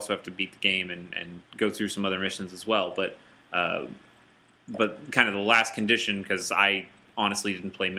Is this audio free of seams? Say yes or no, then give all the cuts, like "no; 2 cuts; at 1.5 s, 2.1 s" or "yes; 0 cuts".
yes; 0 cuts